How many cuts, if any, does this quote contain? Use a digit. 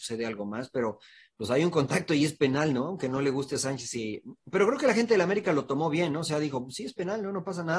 0